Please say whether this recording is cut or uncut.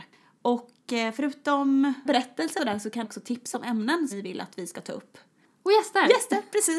cut